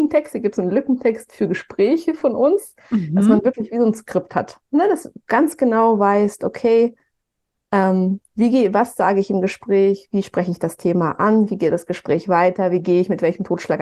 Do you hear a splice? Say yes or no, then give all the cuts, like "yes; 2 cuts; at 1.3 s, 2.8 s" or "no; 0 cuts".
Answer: no; 0 cuts